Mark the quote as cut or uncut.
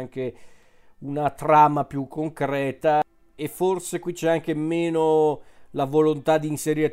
uncut